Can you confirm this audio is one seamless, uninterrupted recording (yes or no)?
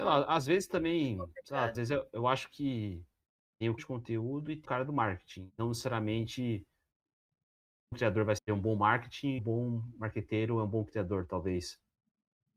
no